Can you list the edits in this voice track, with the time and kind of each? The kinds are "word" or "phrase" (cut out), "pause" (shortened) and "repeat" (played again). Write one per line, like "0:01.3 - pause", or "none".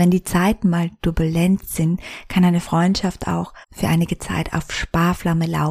0:03.6 - pause